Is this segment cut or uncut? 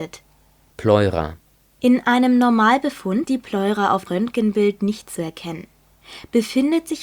cut